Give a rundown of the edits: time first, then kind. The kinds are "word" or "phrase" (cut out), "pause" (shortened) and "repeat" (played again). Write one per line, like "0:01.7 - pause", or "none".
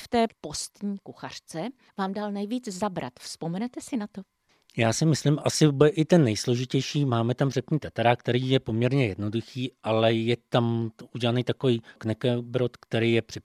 none